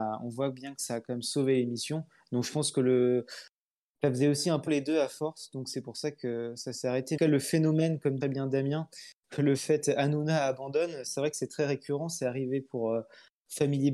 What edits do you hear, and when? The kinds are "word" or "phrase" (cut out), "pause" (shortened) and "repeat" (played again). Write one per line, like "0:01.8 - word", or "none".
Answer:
0:04.7 - word
0:07.2 - phrase
0:08.2 - phrase